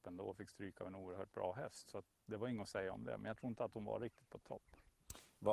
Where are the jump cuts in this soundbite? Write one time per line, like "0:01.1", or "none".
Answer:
none

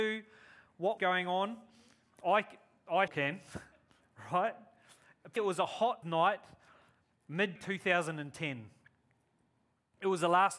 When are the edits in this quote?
0:01.0
0:03.1
0:05.4
0:06.0
0:07.6

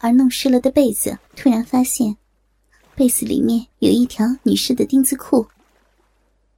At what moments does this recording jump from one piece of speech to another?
0:01.3
0:03.7

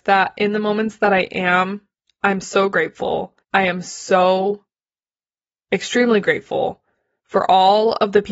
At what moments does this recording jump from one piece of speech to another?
0:03.4

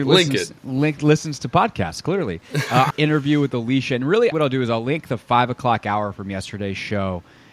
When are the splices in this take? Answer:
0:02.9
0:04.3

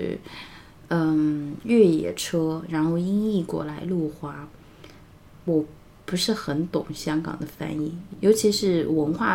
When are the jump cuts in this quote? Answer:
none

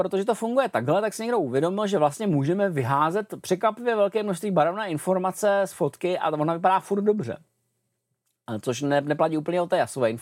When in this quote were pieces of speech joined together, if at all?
none

